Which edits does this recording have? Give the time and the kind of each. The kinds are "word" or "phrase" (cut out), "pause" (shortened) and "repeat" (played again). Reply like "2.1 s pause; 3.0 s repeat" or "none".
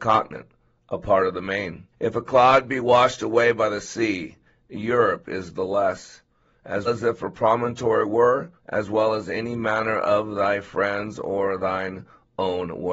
1.9 s pause; 6.9 s word; 8.6 s pause